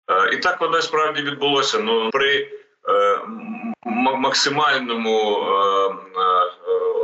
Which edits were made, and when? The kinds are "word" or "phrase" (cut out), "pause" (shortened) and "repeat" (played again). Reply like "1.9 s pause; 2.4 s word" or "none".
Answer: 2.1 s word